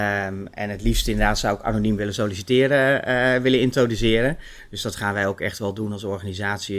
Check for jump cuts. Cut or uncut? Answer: uncut